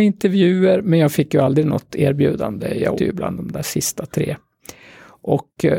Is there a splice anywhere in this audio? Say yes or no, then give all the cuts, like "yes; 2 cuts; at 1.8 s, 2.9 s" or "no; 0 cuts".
yes; 1 cut; at 3.0 s